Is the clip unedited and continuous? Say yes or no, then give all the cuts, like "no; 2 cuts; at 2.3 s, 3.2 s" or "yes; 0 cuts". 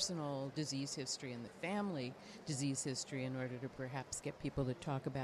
yes; 0 cuts